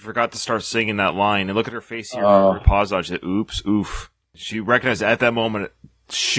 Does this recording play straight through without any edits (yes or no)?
yes